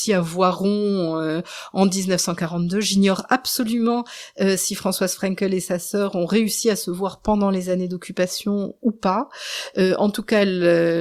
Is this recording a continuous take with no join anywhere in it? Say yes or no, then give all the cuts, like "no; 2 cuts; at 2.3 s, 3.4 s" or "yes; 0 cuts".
yes; 0 cuts